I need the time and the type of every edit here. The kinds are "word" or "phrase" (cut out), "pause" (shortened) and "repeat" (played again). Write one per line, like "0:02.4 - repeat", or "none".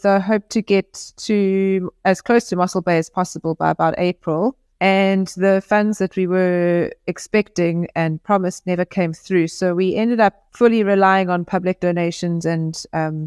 0:10.5 - pause